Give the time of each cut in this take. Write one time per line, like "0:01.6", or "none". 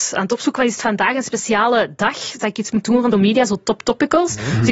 0:03.1